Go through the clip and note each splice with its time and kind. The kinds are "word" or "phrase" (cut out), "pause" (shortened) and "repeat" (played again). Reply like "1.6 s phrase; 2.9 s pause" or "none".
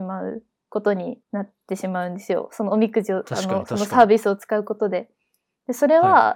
1.2 s pause